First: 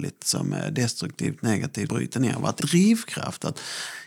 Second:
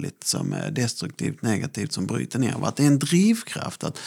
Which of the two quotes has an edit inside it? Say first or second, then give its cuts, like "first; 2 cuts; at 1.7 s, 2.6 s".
first; 2 cuts; at 1.9 s, 2.6 s